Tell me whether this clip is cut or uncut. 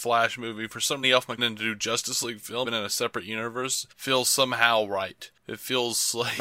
cut